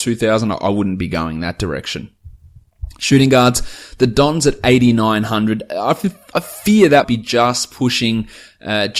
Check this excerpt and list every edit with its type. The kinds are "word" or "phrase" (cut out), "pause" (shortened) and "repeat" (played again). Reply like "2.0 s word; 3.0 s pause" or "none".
7.0 s word